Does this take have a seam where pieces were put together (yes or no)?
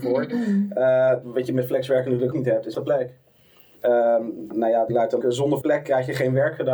yes